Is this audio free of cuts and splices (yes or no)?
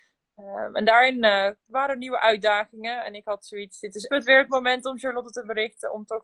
no